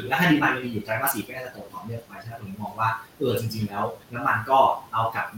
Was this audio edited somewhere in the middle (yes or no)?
yes